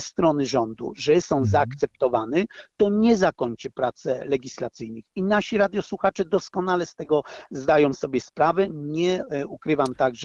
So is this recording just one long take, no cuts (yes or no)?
yes